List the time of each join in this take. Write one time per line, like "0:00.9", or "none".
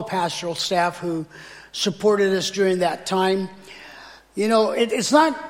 none